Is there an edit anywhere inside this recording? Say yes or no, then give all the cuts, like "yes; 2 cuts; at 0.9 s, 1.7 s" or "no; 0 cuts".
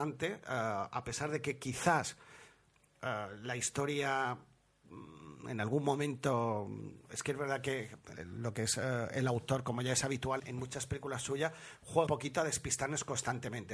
yes; 3 cuts; at 8.1 s, 10.4 s, 12.1 s